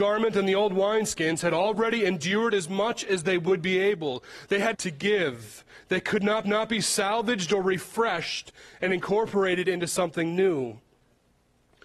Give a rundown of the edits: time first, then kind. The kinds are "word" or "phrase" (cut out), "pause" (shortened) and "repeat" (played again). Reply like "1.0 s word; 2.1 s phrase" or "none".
4.7 s phrase; 6.4 s repeat